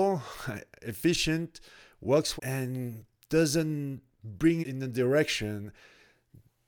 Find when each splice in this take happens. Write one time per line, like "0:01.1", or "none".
0:02.4
0:04.6

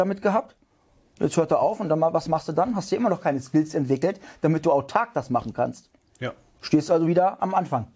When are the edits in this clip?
none

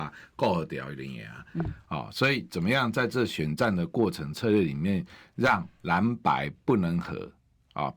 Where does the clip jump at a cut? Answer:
none

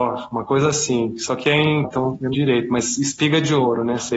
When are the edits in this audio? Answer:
0:01.8
0:02.3

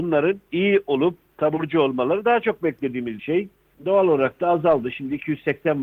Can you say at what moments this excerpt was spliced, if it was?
0:03.2
0:03.7

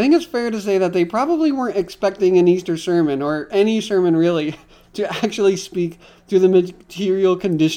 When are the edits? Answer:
none

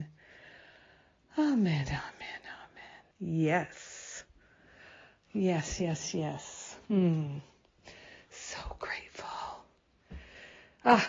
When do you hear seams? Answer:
0:03.1
0:06.8

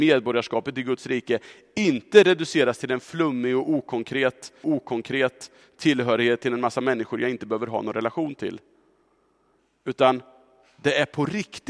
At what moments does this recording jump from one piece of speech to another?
0:04.6

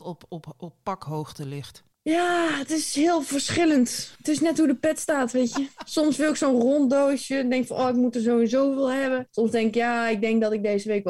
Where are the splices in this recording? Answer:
0:01.9
0:04.2
0:09.3

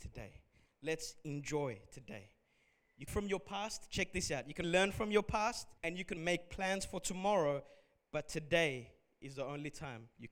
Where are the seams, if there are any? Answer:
0:03.1
0:04.6
0:05.8
0:06.2

